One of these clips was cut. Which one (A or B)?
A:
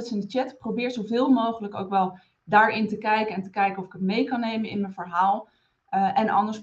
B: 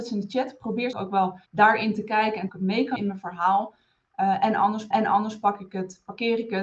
B